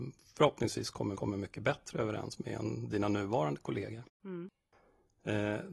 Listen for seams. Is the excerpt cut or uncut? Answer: cut